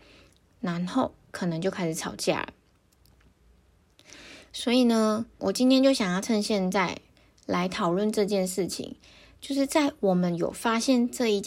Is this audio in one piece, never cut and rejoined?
no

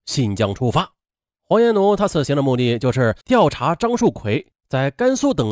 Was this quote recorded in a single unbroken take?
no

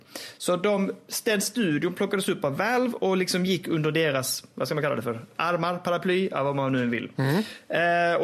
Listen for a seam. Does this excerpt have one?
no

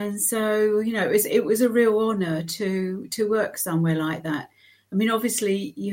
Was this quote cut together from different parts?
no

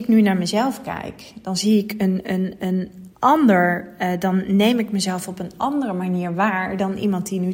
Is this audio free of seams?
no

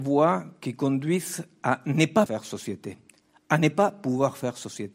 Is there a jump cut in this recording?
yes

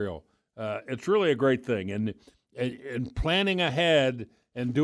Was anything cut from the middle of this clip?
no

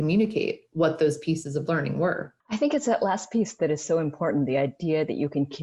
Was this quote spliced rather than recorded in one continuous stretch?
yes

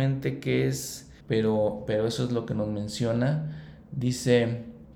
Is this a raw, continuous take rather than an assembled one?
no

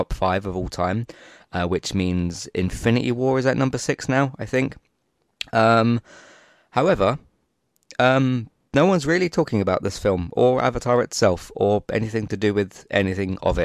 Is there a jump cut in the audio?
no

